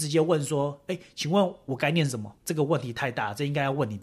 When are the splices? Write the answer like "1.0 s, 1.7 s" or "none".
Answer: 2.4 s